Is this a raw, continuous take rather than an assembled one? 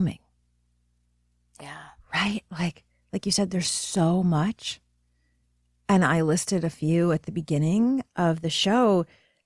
yes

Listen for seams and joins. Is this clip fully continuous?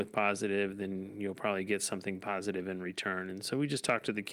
yes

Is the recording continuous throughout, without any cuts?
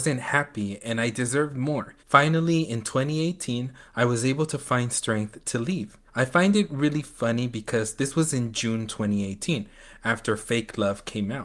no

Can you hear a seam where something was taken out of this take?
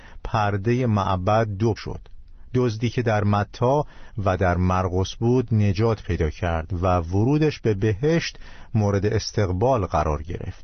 yes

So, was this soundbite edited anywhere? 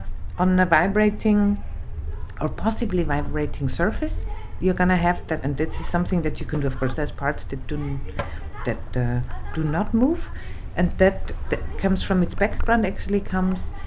yes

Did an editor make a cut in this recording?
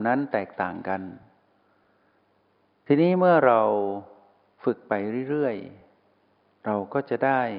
no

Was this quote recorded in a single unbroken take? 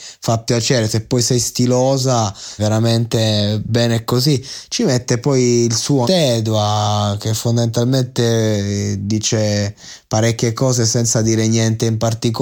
no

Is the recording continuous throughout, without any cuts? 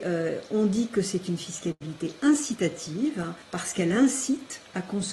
no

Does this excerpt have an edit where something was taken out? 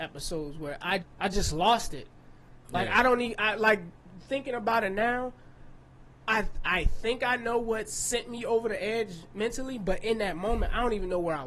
yes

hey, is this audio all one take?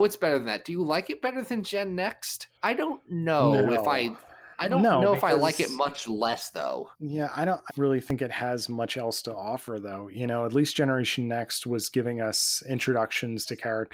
no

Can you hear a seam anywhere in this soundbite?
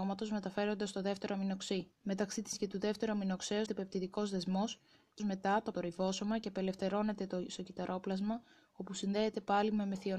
yes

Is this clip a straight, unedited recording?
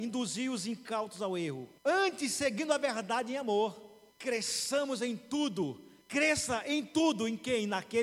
no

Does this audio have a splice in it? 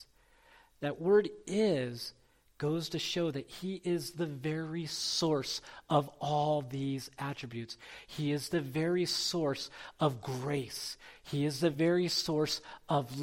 no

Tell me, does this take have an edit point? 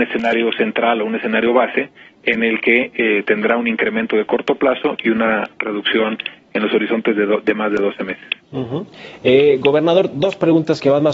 no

